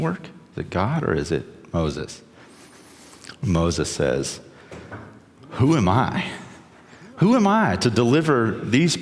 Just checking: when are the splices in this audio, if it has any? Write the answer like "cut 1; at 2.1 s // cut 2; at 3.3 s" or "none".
none